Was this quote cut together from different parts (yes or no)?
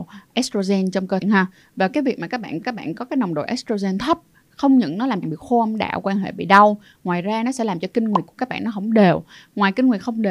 yes